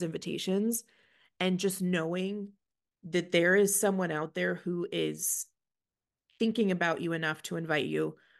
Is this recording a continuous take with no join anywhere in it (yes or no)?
yes